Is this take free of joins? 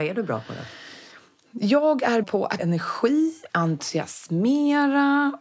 no; 3 cuts; at 2.2 s, 2.6 s, 3.5 s

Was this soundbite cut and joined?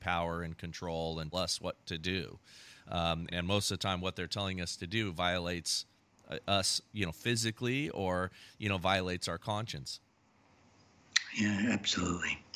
yes; 2 cuts; at 1.3 s, 3.3 s

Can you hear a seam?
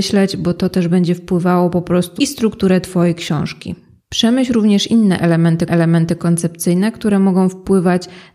yes; 3 cuts; at 2.2 s, 4.0 s, 5.7 s

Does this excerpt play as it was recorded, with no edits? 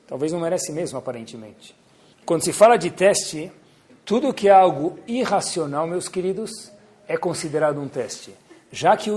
yes; 0 cuts

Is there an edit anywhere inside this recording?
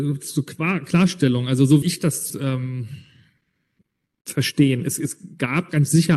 yes; 2 cuts; at 1.8 s, 2.3 s

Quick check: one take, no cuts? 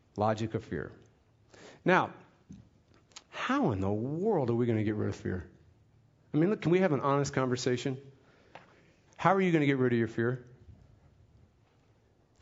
no; 1 cut; at 3.2 s

